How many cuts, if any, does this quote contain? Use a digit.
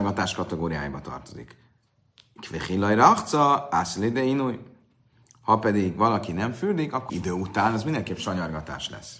1